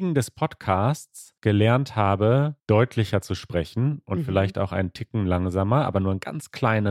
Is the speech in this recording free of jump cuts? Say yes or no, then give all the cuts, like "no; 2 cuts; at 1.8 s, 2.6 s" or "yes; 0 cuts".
no; 2 cuts; at 1.4 s, 2.6 s